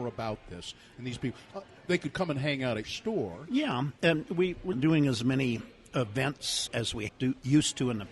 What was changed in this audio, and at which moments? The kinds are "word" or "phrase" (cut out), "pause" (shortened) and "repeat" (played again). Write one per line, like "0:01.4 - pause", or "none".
0:02.8 - word
0:04.7 - word
0:06.7 - word
0:07.1 - word